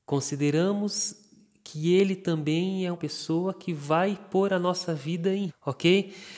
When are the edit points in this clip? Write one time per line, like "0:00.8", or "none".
0:02.9
0:05.5